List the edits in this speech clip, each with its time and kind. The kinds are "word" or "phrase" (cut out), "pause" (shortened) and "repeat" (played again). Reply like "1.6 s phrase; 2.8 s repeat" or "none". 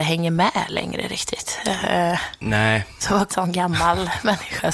3.3 s phrase